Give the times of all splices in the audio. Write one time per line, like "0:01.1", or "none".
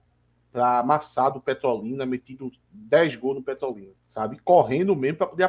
0:04.0